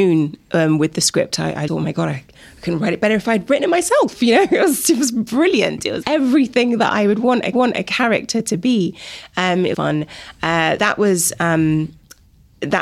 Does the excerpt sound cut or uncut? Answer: cut